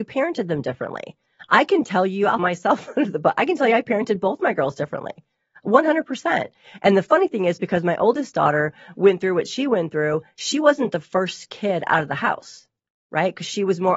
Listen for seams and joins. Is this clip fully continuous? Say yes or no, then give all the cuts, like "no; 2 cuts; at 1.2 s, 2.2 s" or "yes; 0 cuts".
no; 1 cut; at 2.4 s